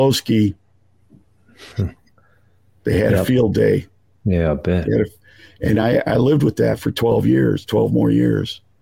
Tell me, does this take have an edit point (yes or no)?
no